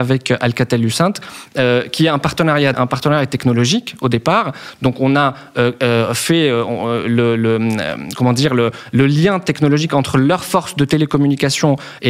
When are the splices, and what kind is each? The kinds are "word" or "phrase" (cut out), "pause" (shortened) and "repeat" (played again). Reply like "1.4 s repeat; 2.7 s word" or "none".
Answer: 2.7 s phrase